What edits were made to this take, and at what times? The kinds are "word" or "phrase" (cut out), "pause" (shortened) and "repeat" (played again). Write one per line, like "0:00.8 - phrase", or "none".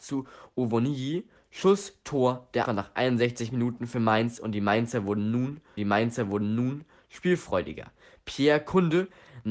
0:02.7 - word
0:05.8 - repeat

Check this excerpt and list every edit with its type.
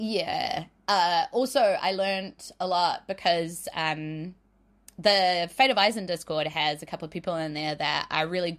none

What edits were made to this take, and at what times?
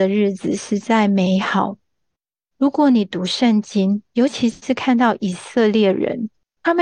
none

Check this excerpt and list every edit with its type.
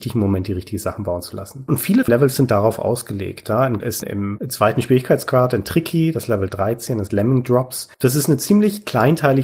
0:02.1 - word
0:03.8 - phrase
0:07.1 - word
0:07.9 - pause

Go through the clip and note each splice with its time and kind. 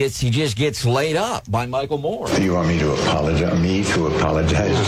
none

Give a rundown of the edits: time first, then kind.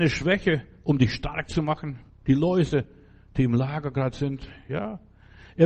0:02.1 - pause

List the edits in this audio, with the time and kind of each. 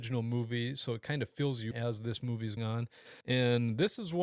0:01.7 - word
0:02.6 - word
0:03.2 - pause

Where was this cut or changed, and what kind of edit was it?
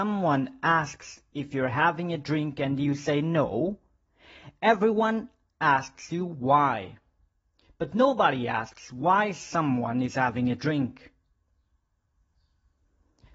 none

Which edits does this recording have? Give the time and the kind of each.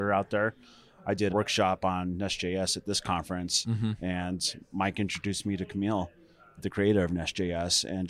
0:01.3 - phrase
0:06.6 - word

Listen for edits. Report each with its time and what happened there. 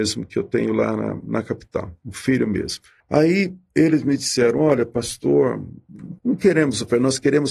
0:03.0 - pause
0:06.2 - pause

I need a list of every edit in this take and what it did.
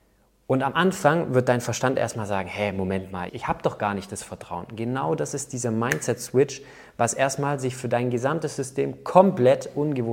0:03.3 - word

